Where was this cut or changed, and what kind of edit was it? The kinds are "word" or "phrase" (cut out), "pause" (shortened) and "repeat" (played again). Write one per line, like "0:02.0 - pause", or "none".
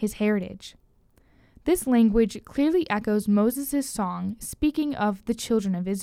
none